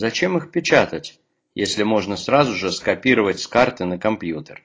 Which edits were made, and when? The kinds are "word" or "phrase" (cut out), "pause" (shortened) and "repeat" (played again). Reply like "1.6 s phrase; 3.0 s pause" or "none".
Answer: none